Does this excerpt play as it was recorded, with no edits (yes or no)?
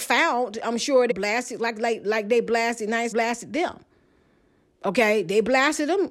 no